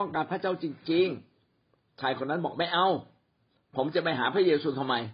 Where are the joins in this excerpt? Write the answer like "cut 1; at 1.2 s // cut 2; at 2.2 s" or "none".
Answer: none